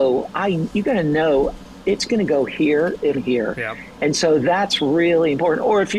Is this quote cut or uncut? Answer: cut